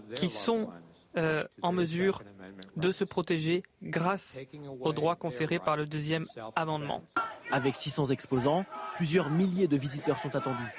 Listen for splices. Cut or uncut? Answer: uncut